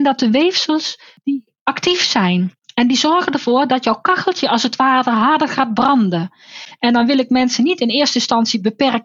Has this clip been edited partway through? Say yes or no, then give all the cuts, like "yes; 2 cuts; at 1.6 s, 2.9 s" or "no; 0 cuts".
no; 0 cuts